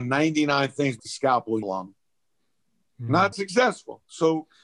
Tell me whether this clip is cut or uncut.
cut